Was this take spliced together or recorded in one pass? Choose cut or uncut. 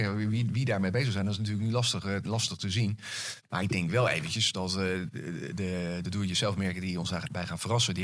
uncut